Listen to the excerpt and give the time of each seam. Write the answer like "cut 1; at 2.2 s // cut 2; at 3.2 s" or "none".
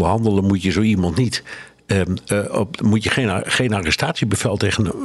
none